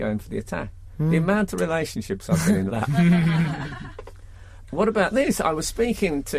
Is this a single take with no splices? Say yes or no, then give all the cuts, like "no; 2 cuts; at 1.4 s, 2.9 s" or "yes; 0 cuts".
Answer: no; 2 cuts; at 2.7 s, 4.7 s